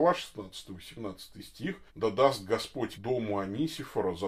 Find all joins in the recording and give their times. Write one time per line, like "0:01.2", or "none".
0:01.9
0:02.9